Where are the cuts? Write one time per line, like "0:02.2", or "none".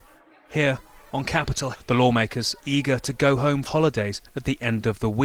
0:01.7
0:02.6
0:03.7

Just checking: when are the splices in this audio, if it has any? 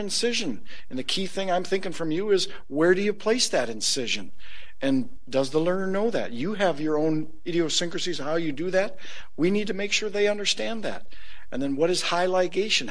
none

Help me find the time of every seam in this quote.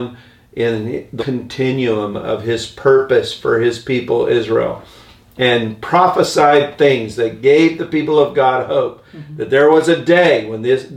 0:01.2

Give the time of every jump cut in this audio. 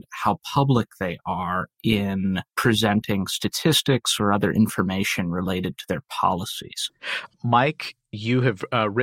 0:02.5

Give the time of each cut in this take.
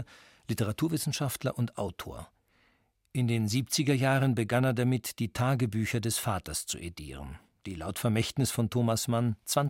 none

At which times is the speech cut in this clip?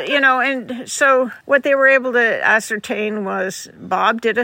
0:01.4

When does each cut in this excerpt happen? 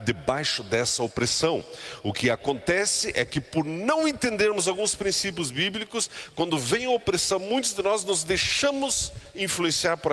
none

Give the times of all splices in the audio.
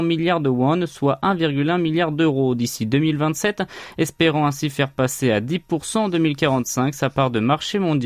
none

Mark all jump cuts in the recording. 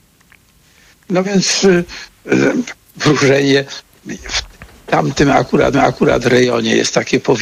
0:05.7

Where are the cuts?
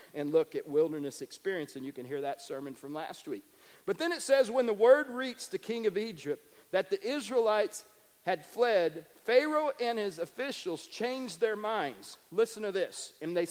none

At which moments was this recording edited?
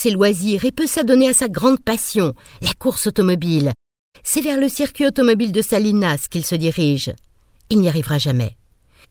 none

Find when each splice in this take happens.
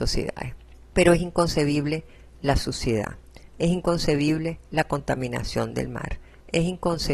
none

